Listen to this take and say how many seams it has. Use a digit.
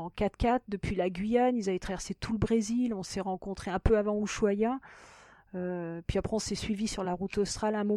0